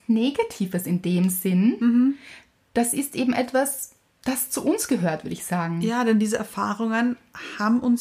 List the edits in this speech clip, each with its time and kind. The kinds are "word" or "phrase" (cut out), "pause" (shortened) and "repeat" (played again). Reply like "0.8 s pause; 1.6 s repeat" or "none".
4.1 s pause